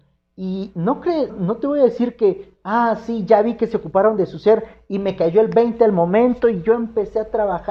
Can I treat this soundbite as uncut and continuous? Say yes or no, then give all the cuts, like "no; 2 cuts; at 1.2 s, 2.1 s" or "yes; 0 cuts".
no; 1 cut; at 1.3 s